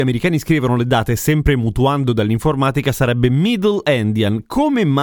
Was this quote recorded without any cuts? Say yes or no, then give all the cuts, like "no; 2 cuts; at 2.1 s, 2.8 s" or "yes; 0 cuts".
yes; 0 cuts